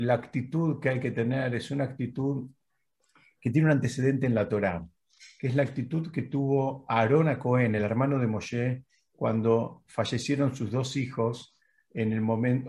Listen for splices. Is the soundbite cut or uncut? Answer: uncut